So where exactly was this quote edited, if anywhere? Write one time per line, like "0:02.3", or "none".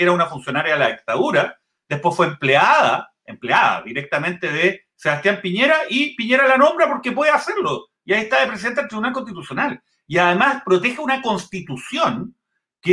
none